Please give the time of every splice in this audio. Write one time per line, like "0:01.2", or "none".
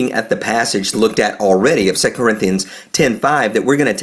0:00.9